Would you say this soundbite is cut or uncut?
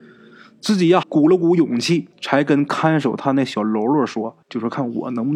cut